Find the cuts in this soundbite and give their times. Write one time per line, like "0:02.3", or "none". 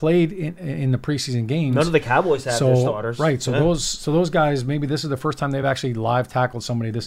none